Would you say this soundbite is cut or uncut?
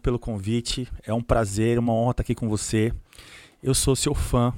uncut